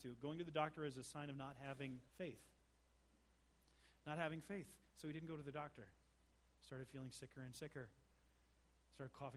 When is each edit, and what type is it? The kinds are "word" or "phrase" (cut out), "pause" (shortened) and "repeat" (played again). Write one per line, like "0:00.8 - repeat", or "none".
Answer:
0:02.1 - pause